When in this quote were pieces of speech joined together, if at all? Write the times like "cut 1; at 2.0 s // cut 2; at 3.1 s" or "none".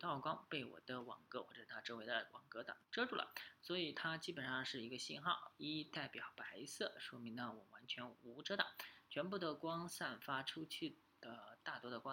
cut 1; at 2.8 s